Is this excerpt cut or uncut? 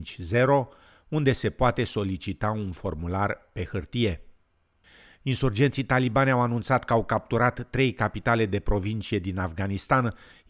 uncut